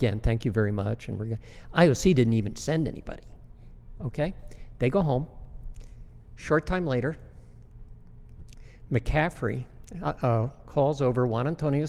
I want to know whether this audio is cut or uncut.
uncut